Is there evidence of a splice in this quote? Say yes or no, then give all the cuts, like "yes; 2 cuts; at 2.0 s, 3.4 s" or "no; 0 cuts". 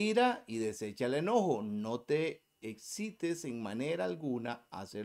no; 0 cuts